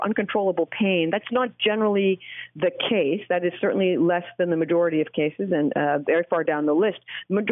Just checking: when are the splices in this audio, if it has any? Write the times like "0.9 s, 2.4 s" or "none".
none